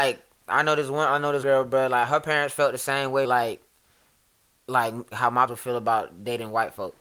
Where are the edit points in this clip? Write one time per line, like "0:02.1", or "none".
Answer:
0:01.4
0:03.2
0:05.1
0:05.5